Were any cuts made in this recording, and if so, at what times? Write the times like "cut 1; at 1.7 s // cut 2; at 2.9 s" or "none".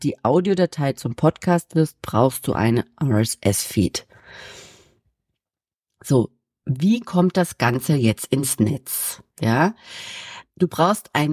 none